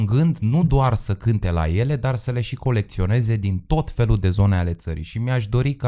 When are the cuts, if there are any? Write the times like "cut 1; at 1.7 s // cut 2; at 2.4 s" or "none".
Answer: none